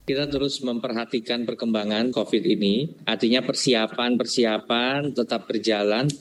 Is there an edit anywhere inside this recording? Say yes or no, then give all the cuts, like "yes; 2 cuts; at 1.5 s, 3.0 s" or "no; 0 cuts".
yes; 1 cut; at 2.1 s